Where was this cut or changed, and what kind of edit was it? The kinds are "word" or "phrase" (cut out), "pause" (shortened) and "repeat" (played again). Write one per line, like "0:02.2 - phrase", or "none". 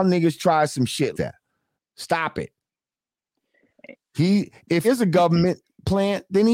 0:01.1 - word
0:01.8 - word
0:04.8 - word

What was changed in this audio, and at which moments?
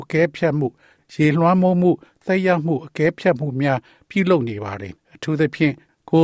0:05.0 - pause

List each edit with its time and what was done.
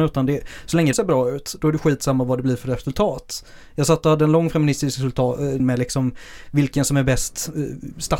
0:00.9 - word
0:05.6 - word

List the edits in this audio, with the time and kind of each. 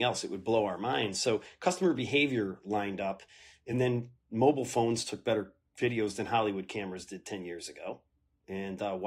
none

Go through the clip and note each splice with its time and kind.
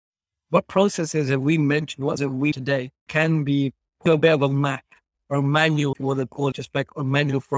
0:02.2 - word
0:02.5 - word
0:03.1 - word
0:04.1 - word
0:05.9 - word
0:06.5 - word

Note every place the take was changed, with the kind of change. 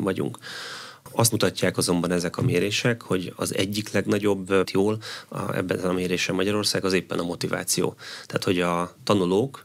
0:01.3 - word
0:04.6 - phrase

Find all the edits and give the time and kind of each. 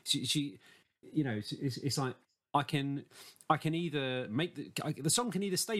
none

